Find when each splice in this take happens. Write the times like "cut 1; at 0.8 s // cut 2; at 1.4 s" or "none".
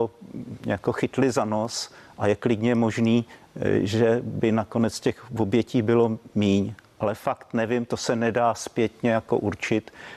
none